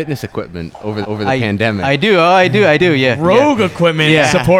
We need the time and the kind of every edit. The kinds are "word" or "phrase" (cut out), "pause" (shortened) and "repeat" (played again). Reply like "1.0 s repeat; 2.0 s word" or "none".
1.0 s repeat; 2.8 s word